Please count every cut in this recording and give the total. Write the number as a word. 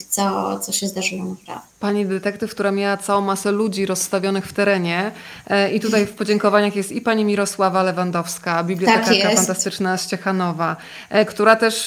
one